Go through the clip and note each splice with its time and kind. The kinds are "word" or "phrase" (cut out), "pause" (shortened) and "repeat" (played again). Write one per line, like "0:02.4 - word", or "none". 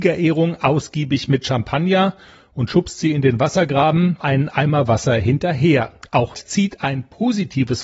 0:04.2 - phrase
0:06.3 - word